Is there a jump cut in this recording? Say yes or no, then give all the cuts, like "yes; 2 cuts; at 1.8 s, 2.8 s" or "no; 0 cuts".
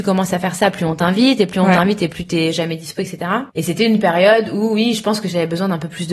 yes; 1 cut; at 3.5 s